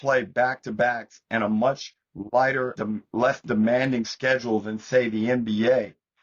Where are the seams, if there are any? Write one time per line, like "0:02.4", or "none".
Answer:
0:02.8